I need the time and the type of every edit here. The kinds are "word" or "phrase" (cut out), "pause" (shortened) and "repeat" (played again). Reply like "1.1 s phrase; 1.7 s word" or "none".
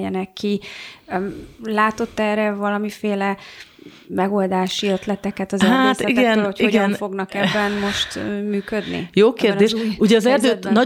1.5 s pause

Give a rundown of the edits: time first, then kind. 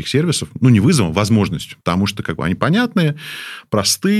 1.8 s pause

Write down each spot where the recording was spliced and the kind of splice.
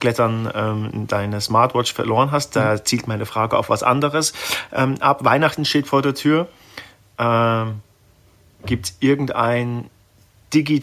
none

